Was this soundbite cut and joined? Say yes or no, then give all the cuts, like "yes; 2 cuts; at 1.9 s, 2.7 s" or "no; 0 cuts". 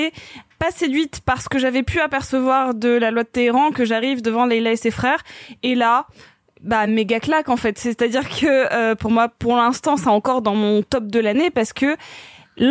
no; 0 cuts